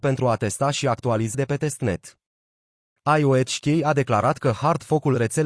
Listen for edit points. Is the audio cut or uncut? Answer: cut